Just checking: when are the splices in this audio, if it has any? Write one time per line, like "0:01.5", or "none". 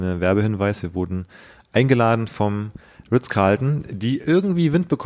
none